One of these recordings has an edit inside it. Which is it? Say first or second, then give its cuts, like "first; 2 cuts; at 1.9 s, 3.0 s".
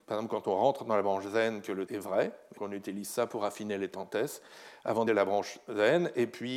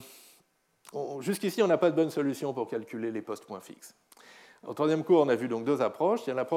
first; 4 cuts; at 1.9 s, 2.6 s, 3.9 s, 5.1 s